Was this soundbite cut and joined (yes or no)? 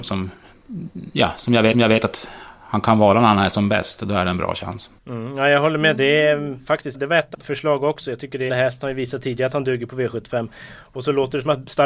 yes